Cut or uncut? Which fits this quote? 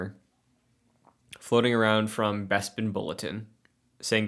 uncut